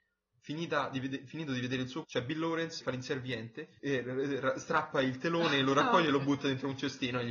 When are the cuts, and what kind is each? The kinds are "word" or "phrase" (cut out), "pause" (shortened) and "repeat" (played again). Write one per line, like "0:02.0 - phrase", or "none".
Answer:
0:02.0 - word
0:02.8 - word
0:03.8 - word

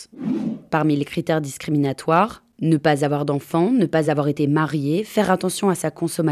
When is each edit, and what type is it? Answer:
none

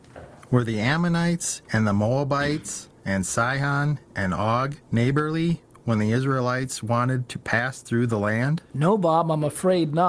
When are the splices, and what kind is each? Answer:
0:04.8 - pause

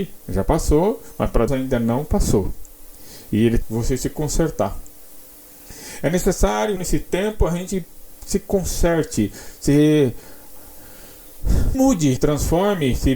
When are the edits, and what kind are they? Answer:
0:01.5 - word
0:03.6 - word
0:06.8 - word
0:11.7 - word
0:12.2 - word

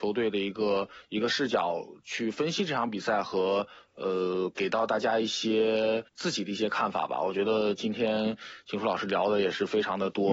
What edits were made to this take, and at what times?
0:06.1 - pause

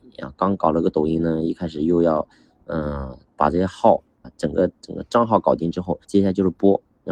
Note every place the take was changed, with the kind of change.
0:04.2 - word
0:06.0 - pause

